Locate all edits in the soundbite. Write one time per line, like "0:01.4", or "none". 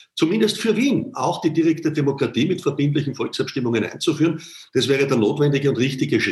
none